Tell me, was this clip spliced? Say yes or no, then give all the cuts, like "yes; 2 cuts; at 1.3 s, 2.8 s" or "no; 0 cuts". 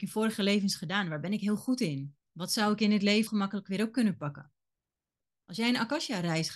yes; 2 cuts; at 2.2 s, 3.3 s